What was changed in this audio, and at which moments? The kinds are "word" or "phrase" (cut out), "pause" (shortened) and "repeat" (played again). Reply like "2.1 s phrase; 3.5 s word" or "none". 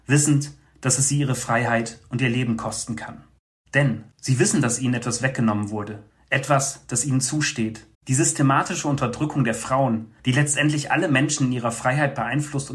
4.1 s pause; 6.1 s pause; 7.9 s pause; 10.2 s pause